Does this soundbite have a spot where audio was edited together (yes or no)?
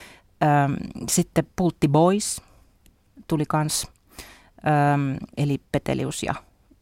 no